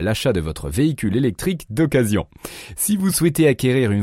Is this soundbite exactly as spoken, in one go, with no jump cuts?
yes; 0 cuts

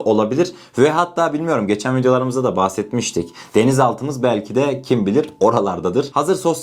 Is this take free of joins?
yes; 0 cuts

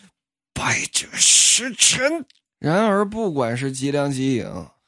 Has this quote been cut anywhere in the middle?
yes; 1 cut; at 2.4 s

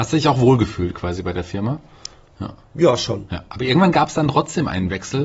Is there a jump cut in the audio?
no; 0 cuts

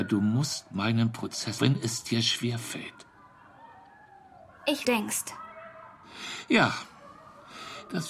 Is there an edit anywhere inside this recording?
yes; 2 cuts; at 1.6 s, 4.8 s

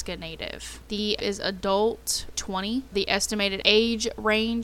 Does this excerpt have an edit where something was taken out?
yes; 3 cuts; at 1.2 s, 2.3 s, 2.9 s

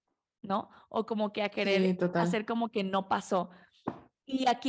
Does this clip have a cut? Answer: no; 0 cuts

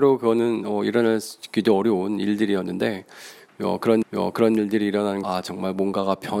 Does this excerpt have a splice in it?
yes; 2 cuts; at 4.0 s, 5.2 s

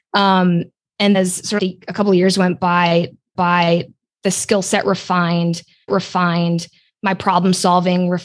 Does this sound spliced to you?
yes; 4 cuts; at 1.1 s, 1.6 s, 3.4 s, 5.9 s

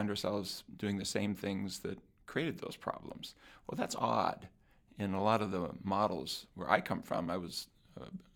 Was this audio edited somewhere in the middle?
no; 0 cuts

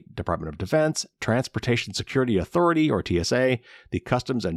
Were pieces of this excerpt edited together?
no; 0 cuts

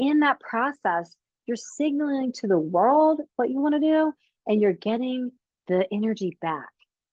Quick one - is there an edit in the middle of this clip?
no; 0 cuts

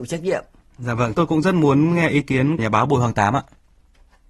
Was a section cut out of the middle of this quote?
yes; 2 cuts; at 1.1 s, 2.6 s

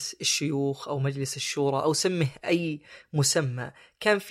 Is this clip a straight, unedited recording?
yes; 0 cuts

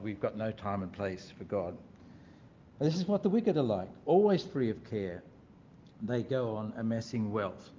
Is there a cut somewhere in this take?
no; 0 cuts

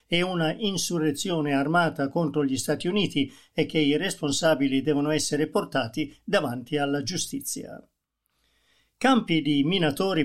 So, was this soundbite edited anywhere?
no; 0 cuts

